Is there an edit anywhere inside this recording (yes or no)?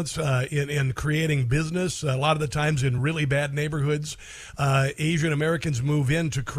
no